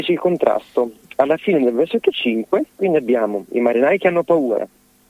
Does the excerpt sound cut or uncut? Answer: cut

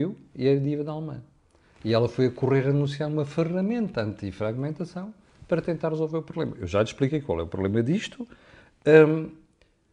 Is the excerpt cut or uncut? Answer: uncut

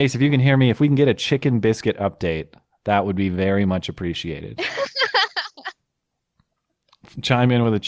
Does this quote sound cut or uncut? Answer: uncut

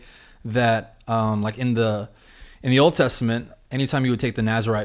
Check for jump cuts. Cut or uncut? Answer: uncut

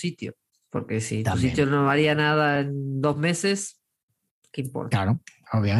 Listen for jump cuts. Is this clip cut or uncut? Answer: uncut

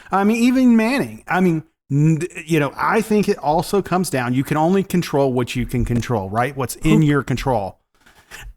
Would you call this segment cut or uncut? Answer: uncut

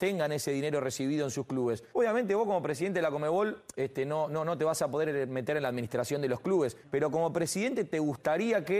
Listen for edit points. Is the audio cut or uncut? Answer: cut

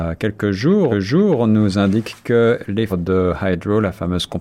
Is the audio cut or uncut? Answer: cut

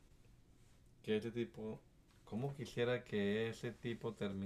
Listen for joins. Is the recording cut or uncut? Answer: uncut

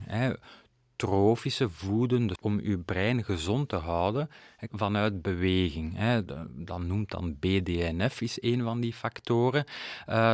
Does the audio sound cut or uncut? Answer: cut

